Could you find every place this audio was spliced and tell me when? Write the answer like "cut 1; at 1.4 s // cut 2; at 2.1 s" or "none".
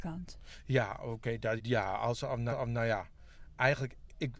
cut 1; at 1.6 s // cut 2; at 2.5 s